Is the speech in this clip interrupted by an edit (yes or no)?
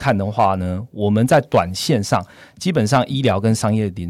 no